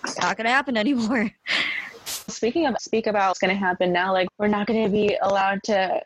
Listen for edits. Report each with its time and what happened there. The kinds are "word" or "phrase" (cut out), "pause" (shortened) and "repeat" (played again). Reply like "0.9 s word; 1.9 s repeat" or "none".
2.3 s word; 2.8 s phrase; 3.3 s phrase; 4.3 s word